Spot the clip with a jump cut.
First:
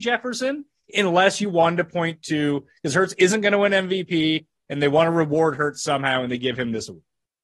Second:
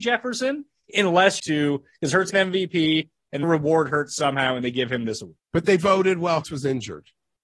second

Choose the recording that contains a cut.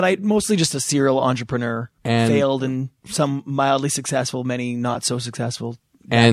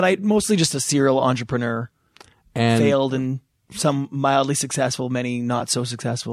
first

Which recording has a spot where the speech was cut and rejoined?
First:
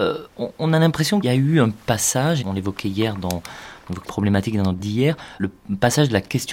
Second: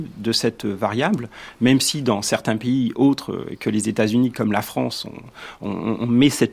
first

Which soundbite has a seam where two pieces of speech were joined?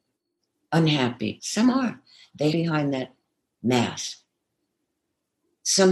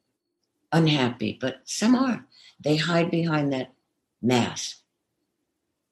first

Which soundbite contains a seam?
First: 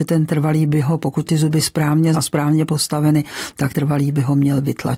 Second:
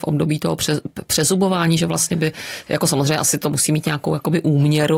first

